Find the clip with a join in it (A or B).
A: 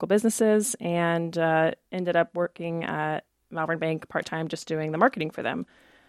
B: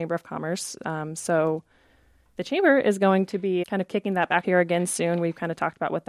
B